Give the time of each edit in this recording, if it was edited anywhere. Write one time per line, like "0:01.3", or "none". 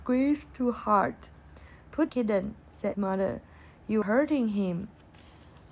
0:02.1
0:02.9
0:04.0